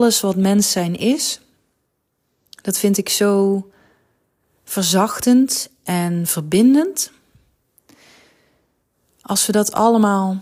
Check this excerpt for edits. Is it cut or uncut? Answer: uncut